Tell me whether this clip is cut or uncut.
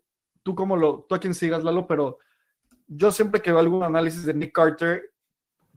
uncut